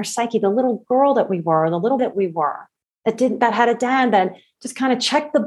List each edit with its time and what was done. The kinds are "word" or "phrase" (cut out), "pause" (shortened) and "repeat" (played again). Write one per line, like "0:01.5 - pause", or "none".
0:02.0 - word